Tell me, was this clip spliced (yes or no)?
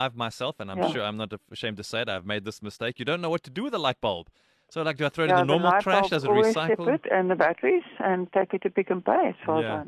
no